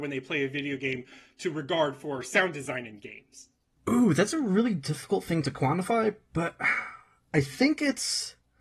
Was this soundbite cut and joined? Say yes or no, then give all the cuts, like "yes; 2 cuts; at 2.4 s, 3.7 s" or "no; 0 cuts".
no; 0 cuts